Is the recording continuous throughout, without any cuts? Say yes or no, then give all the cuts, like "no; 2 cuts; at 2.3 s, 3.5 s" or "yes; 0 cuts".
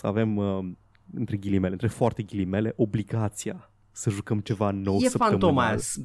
yes; 0 cuts